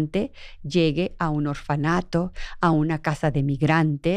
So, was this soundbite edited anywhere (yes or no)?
no